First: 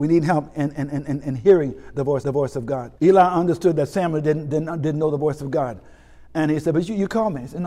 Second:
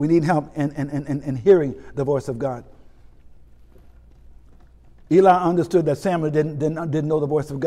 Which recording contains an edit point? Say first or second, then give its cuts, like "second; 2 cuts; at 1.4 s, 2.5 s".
first; 2 cuts; at 2.2 s, 3.0 s